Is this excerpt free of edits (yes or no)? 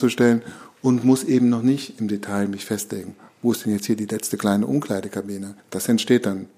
no